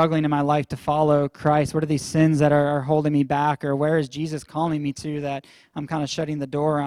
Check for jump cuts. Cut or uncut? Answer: uncut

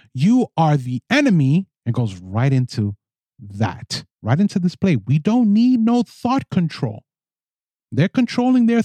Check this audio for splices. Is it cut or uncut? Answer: cut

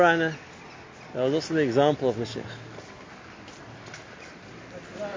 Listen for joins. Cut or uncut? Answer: uncut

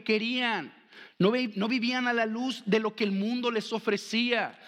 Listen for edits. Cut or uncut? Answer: uncut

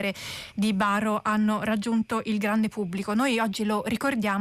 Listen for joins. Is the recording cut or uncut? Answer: uncut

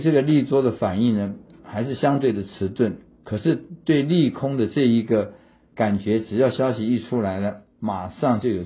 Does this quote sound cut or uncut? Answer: uncut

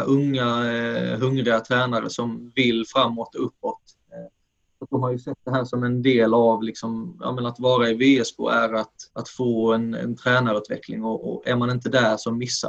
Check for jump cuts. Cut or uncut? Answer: cut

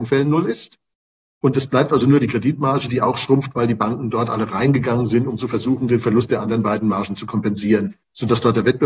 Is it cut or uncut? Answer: uncut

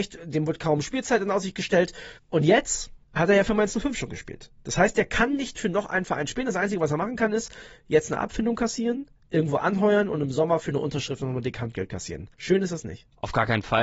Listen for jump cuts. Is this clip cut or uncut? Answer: cut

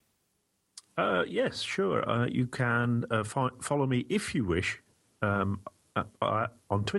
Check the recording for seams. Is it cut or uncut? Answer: uncut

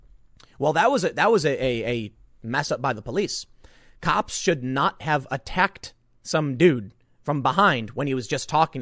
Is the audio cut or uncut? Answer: uncut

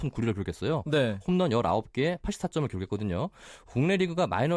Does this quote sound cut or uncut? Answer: uncut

